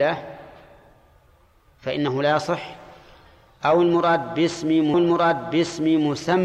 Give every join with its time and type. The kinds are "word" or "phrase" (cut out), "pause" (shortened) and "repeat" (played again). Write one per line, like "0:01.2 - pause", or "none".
0:04.9 - repeat